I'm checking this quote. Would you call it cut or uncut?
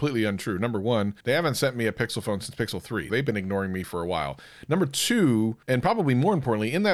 cut